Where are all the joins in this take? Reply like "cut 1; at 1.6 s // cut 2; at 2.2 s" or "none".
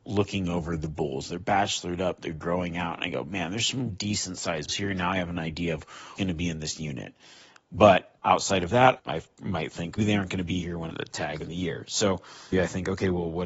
cut 1; at 3.9 s // cut 2; at 4.7 s // cut 3; at 6.2 s // cut 4; at 9.0 s // cut 5; at 10.0 s // cut 6; at 10.9 s // cut 7; at 11.4 s // cut 8; at 12.5 s